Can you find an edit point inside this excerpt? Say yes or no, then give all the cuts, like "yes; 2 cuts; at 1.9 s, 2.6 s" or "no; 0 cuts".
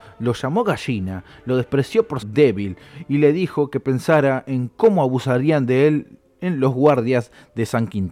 yes; 1 cut; at 2.2 s